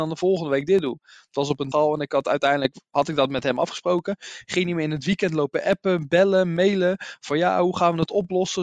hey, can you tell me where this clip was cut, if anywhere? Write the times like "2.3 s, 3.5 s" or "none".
1.7 s